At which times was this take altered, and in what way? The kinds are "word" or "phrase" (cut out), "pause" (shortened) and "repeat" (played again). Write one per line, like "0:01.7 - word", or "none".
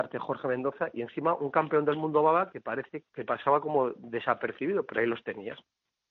0:03.0 - word